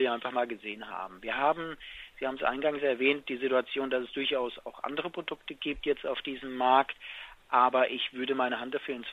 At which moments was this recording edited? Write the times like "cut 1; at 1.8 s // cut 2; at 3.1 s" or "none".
none